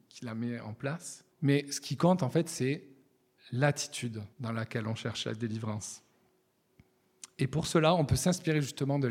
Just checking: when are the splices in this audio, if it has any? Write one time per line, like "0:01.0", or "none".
0:01.3
0:04.3